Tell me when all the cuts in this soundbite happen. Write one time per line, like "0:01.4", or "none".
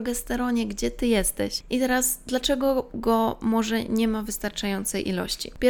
none